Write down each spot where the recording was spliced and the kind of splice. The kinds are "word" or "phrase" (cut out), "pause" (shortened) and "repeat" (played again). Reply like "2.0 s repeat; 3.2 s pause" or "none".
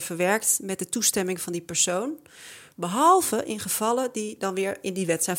none